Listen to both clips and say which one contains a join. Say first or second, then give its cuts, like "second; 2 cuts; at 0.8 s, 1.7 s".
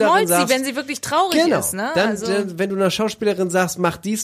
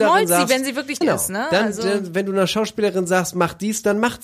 second; 1 cut; at 1.0 s